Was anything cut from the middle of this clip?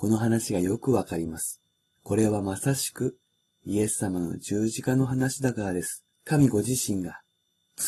yes; 2 cuts; at 1.8 s, 6.1 s

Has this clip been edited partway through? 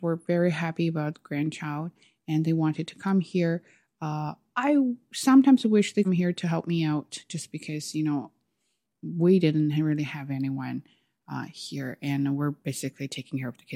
yes; 1 cut; at 6.0 s

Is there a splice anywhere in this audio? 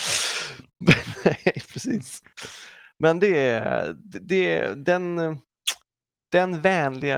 no; 0 cuts

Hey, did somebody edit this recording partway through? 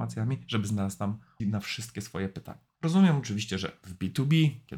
yes; 2 cuts; at 1.4 s, 2.7 s

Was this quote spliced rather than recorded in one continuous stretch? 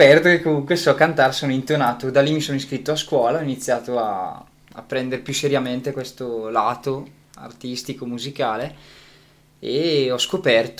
no; 0 cuts

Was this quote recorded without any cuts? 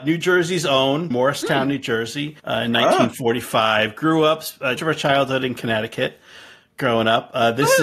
no; 3 cuts; at 1.1 s, 2.4 s, 4.8 s

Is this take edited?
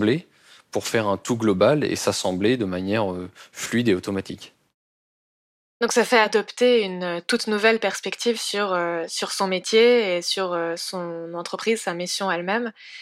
no; 0 cuts

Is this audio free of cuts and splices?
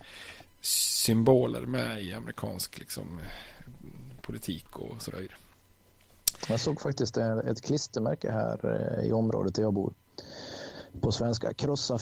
yes; 0 cuts

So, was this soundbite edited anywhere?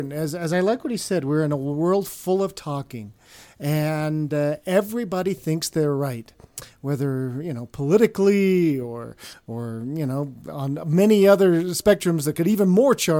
no; 0 cuts

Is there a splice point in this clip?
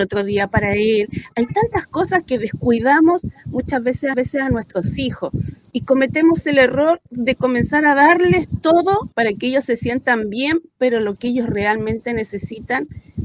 yes; 2 cuts; at 4.1 s, 9.1 s

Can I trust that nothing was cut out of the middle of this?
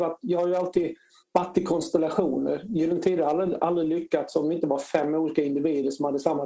yes; 0 cuts

